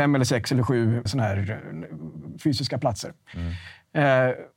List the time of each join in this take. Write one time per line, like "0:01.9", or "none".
0:01.1

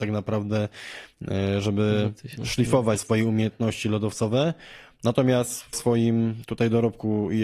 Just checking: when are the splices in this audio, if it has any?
0:02.4
0:03.0
0:05.7

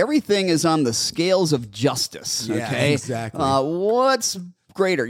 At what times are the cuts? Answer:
none

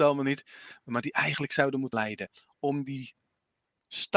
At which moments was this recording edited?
0:01.9

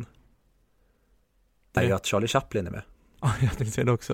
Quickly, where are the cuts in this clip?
0:01.8

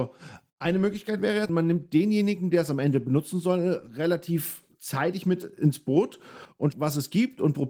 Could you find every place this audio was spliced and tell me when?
0:01.5
0:06.7

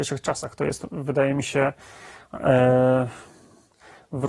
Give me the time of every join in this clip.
none

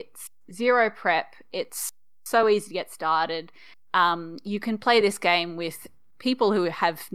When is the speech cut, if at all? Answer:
none

